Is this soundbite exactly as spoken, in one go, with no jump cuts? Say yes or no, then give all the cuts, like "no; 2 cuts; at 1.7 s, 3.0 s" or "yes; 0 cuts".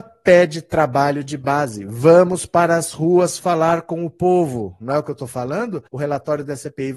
no; 1 cut; at 5.9 s